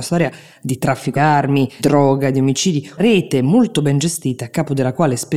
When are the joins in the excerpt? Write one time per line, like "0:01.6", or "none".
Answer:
0:01.2
0:01.8
0:03.0